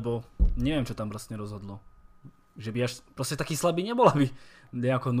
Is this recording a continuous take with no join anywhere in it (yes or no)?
yes